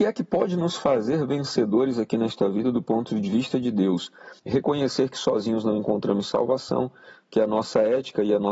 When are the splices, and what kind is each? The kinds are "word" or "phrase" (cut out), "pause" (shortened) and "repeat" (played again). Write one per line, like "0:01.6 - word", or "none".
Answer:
0:04.4 - pause